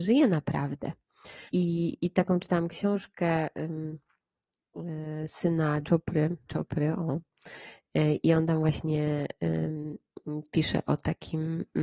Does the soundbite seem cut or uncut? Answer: cut